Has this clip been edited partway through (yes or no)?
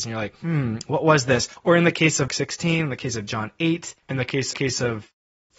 yes